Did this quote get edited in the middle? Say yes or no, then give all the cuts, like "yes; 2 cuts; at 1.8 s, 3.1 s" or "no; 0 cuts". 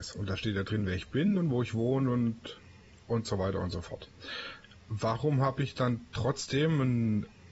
no; 0 cuts